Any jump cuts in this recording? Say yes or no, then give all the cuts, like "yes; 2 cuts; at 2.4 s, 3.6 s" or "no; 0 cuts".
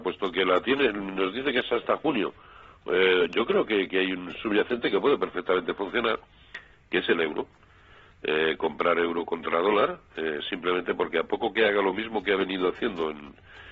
no; 0 cuts